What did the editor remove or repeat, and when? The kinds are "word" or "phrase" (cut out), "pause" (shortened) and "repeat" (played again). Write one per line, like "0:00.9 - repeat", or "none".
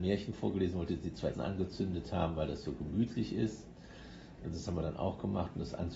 0:01.3 - word